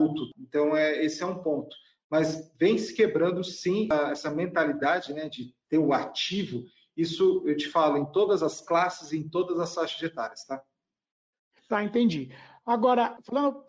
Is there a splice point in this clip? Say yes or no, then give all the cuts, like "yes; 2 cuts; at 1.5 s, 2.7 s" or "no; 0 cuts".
no; 0 cuts